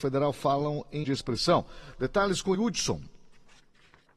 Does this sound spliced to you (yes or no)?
yes